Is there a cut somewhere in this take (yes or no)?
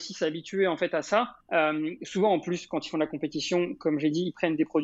yes